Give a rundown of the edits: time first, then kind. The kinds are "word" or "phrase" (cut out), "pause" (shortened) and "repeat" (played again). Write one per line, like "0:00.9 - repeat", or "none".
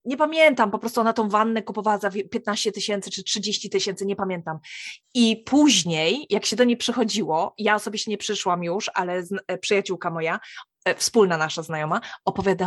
0:05.0 - pause